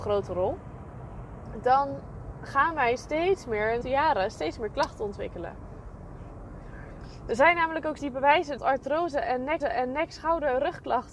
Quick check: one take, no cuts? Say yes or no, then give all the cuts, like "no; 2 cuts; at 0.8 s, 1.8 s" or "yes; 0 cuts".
no; 4 cuts; at 3.8 s, 8.0 s, 8.6 s, 9.6 s